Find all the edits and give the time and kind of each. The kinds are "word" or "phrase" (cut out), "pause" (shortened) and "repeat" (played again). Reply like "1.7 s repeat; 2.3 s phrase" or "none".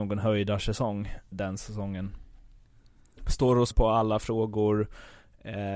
1.3 s word; 3.7 s word